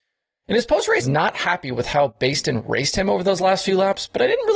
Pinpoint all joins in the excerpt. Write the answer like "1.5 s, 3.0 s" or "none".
1.0 s